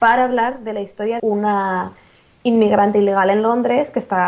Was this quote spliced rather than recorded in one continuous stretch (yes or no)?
yes